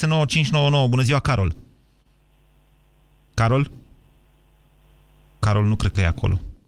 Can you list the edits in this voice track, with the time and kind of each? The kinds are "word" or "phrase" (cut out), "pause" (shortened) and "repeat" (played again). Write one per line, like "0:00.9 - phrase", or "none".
none